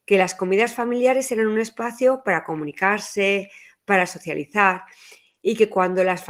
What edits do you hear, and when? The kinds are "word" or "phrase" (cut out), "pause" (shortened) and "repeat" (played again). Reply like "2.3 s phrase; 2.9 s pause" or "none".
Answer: none